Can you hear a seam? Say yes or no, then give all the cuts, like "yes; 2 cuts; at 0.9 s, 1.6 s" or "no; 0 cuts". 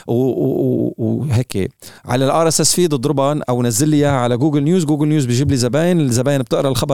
yes; 1 cut; at 2.0 s